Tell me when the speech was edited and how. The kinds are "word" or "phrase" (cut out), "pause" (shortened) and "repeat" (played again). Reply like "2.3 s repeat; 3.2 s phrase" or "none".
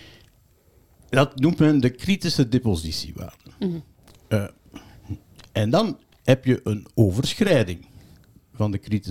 none